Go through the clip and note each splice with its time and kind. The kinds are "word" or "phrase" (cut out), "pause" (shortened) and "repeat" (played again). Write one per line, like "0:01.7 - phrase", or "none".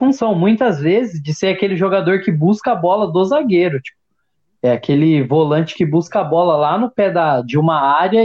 none